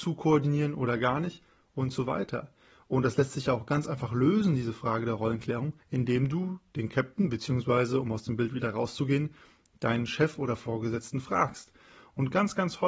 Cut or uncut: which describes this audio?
cut